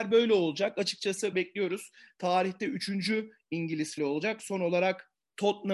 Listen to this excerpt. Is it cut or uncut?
cut